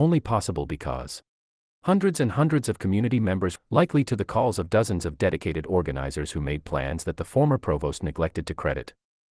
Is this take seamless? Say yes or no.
no